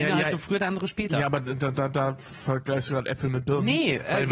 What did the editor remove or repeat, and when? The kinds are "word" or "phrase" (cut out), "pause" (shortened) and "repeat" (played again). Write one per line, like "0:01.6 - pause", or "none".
none